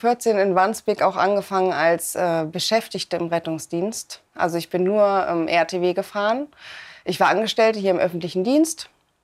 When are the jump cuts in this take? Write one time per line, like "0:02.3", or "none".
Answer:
none